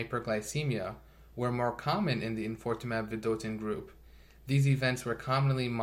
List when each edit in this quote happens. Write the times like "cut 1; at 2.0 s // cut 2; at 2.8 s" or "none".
none